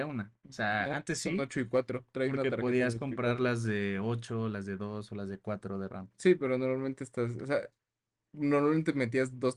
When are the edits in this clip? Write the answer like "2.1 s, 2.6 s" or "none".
none